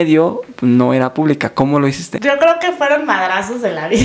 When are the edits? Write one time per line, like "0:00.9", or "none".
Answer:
none